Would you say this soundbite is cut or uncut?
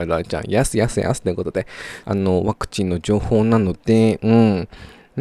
cut